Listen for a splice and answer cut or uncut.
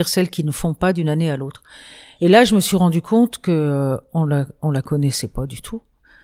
uncut